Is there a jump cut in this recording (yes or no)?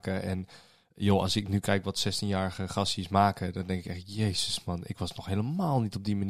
no